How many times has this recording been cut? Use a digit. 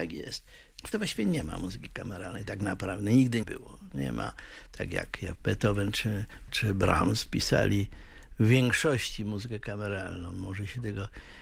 4